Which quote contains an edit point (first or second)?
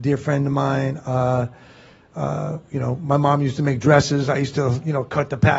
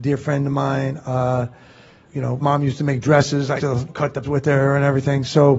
second